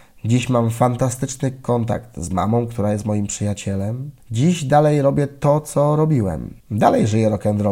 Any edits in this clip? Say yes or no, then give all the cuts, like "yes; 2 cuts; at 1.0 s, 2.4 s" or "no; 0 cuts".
yes; 2 cuts; at 4.2 s, 6.6 s